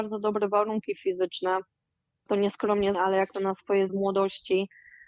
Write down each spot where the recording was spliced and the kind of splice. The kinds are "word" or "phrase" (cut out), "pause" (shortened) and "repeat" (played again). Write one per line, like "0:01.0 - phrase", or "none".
0:02.3 - word
0:02.9 - word
0:03.3 - word
0:03.9 - word

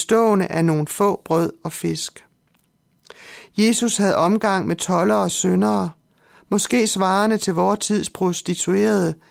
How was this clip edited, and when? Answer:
none

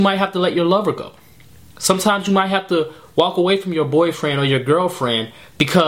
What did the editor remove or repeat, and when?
none

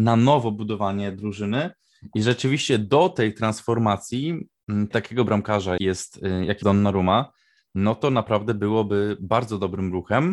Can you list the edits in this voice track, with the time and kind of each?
0:04.9 - word
0:05.8 - word
0:06.6 - word

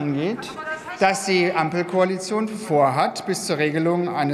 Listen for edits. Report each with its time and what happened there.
none

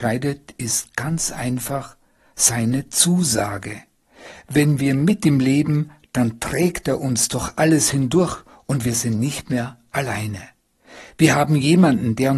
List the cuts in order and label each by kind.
none

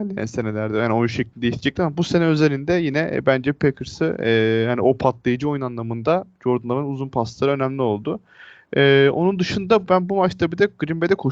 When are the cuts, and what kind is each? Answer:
none

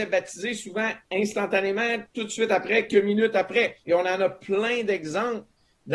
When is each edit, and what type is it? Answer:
0:02.9 - word
0:03.8 - pause

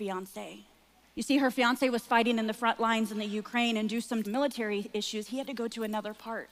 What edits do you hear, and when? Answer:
0:01.0 - pause
0:04.2 - word

